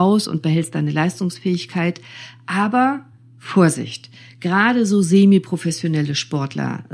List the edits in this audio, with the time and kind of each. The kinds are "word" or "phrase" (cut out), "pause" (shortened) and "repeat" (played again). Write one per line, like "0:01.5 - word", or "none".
none

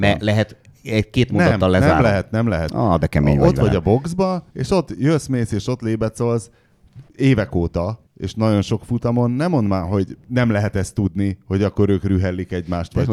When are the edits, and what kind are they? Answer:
0:04.5 - pause
0:07.1 - pause
0:08.1 - pause
0:10.2 - pause

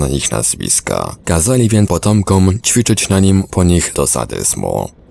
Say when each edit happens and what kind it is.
0:01.9 - word
0:03.5 - word
0:03.9 - word

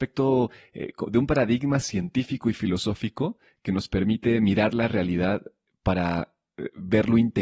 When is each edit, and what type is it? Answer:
none

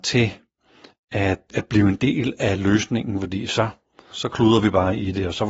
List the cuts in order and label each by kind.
0:01.5 - word
0:04.1 - word

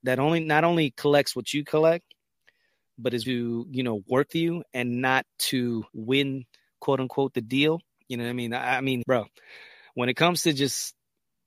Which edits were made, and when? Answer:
0:03.2 - word
0:04.3 - word
0:05.4 - word
0:05.9 - pause
0:08.0 - pause
0:09.0 - word

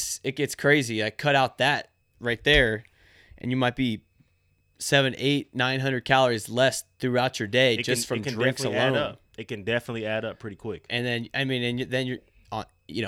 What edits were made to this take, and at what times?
none

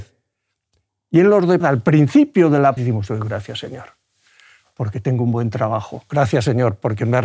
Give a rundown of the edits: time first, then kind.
0:01.6 - word
0:02.8 - word

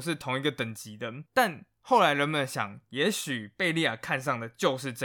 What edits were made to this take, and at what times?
0:01.3 - pause

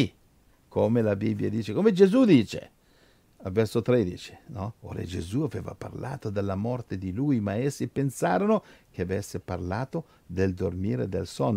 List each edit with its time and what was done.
0:04.8 - pause

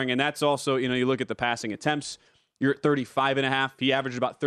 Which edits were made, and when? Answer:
none

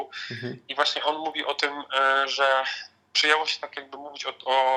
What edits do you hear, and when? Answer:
none

